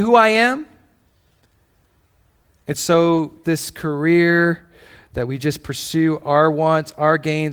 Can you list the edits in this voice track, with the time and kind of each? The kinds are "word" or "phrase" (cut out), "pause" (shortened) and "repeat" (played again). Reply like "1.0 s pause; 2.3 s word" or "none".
3.4 s phrase